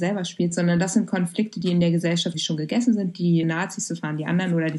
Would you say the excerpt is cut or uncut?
cut